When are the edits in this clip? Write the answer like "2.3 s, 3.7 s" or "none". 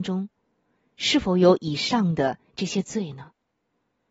none

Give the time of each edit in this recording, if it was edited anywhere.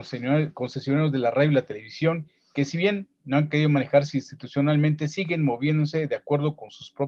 none

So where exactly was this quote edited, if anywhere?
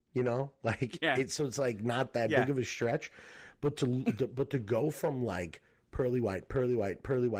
none

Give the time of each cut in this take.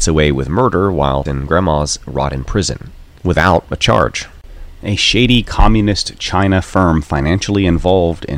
1.3 s

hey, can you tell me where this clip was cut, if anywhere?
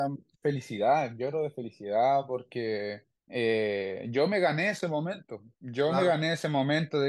3.2 s, 5.5 s

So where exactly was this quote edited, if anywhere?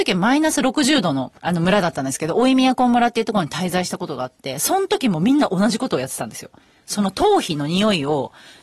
1.4 s

